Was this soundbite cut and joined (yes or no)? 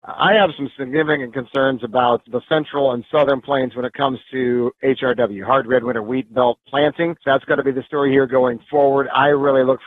no